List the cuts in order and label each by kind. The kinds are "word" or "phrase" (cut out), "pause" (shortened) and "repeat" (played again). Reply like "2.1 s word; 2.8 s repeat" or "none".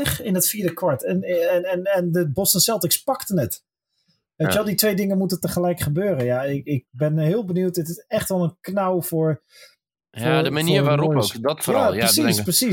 none

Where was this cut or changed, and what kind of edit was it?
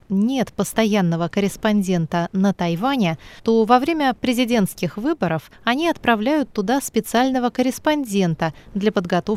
3.4 s pause; 5.5 s pause

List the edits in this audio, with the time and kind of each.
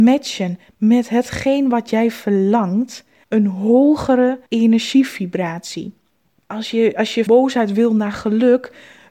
3.2 s phrase; 4.5 s pause; 7.3 s word

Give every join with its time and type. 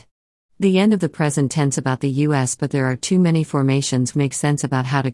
4.1 s word

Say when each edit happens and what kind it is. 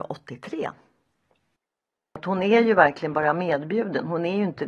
none

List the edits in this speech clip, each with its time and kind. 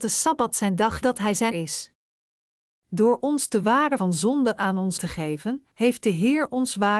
1.0 s phrase; 1.5 s word; 4.0 s word; 5.0 s word; 5.7 s pause

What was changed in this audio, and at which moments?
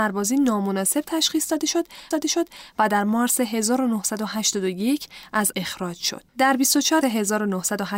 2.1 s repeat; 5.5 s word; 6.3 s pause; 7.0 s word

